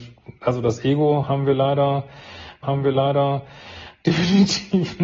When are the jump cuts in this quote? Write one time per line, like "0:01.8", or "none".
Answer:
0:02.6